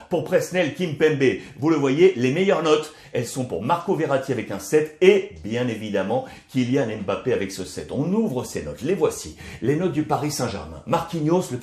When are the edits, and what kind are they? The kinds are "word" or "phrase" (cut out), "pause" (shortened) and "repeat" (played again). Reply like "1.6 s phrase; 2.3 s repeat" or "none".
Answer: none